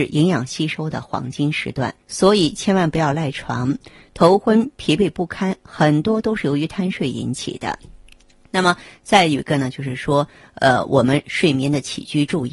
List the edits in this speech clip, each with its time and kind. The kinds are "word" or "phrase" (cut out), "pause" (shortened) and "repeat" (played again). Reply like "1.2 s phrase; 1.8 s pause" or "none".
2.0 s pause

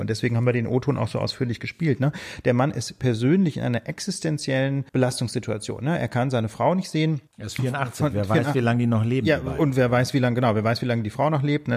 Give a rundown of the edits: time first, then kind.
4.9 s pause; 7.3 s pause

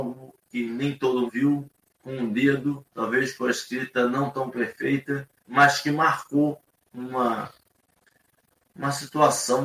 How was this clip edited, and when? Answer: 1.3 s word; 2.9 s pause; 5.4 s pause

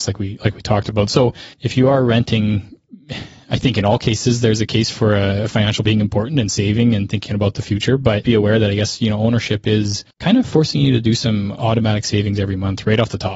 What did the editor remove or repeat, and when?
1.5 s pause; 5.9 s word; 8.2 s word; 10.1 s pause

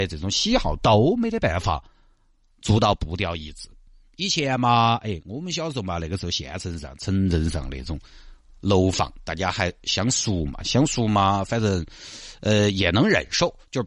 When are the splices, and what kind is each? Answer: none

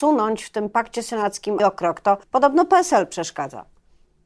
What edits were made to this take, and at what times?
1.6 s word; 2.2 s pause

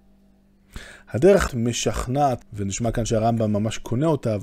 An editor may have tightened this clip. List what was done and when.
1.5 s word; 2.4 s word

